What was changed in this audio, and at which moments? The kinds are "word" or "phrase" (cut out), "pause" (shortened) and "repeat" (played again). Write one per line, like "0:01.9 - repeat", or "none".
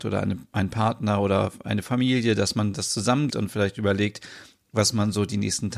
0:03.3 - word

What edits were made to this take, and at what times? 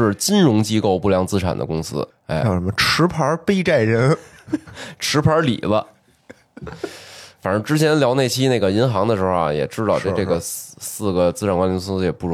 0:02.1 - pause

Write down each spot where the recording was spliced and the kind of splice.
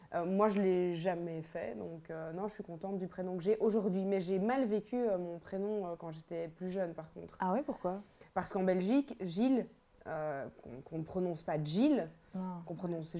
none

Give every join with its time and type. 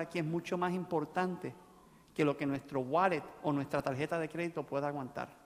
none

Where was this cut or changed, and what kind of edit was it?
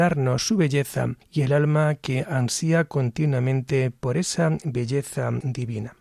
none

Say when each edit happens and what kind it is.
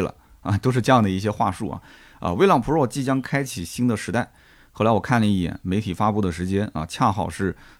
none

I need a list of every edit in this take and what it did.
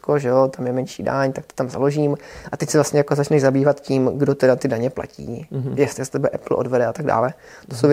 none

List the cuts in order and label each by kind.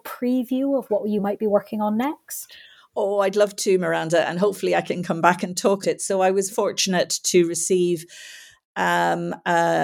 0:05.8 - word
0:06.5 - word

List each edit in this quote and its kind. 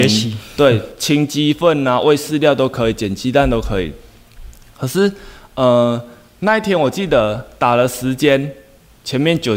none

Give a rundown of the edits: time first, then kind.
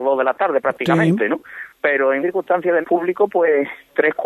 0:02.2 - word
0:02.8 - word

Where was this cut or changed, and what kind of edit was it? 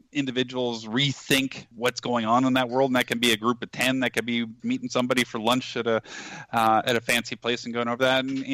0:01.7 - word
0:04.6 - word

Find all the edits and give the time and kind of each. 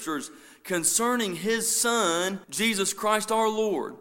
0:02.4 - pause

